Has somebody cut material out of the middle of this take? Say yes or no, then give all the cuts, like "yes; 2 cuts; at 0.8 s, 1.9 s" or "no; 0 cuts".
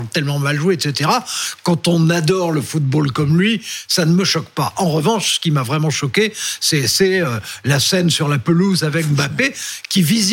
no; 0 cuts